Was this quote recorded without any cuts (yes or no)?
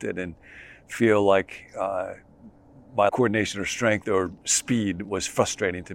no